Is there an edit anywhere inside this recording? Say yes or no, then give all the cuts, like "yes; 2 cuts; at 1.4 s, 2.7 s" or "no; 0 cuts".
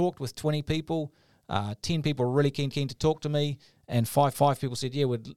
yes; 2 cuts; at 2.7 s, 4.3 s